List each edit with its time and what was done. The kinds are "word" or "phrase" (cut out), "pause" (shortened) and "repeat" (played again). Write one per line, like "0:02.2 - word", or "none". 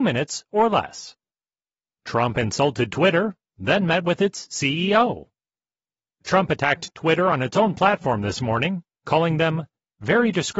none